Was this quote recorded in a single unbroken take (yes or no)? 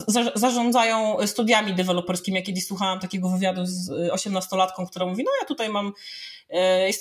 yes